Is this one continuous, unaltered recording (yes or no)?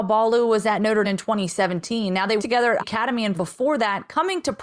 no